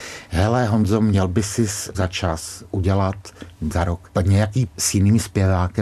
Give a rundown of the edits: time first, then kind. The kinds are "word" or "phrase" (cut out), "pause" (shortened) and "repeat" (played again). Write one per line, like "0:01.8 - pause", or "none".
0:01.9 - word
0:03.7 - word
0:04.7 - word